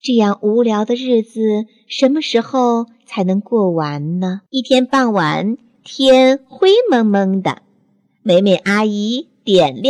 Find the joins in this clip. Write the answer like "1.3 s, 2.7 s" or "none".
4.5 s